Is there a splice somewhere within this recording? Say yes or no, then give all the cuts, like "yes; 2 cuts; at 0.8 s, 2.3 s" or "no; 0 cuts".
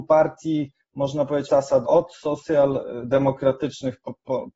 yes; 2 cuts; at 1.5 s, 1.8 s